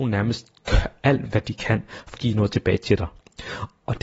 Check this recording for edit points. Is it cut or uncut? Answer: cut